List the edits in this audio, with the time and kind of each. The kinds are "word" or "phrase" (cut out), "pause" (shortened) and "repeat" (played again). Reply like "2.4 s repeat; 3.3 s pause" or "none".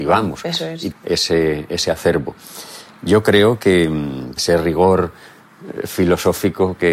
0.9 s word; 4.4 s phrase